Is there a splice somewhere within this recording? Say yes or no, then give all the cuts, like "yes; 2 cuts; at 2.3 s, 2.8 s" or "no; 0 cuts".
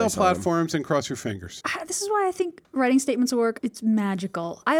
no; 0 cuts